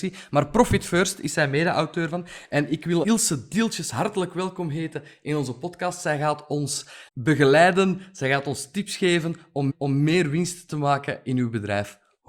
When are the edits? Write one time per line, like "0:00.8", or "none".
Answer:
0:03.0
0:07.1
0:09.7